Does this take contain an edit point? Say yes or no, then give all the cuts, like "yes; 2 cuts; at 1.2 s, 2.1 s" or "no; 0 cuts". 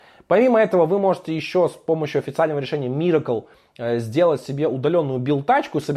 no; 0 cuts